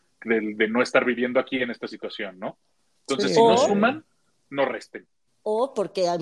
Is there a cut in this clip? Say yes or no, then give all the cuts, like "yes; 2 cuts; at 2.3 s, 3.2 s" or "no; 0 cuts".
no; 0 cuts